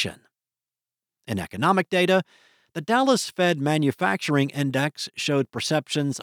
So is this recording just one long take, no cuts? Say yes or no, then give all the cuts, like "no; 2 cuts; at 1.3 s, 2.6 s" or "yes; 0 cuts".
yes; 0 cuts